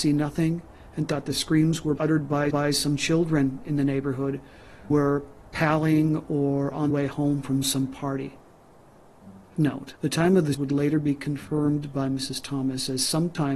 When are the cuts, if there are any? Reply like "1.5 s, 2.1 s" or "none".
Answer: 2.0 s, 2.5 s, 4.9 s, 6.9 s, 9.6 s, 10.0 s, 10.5 s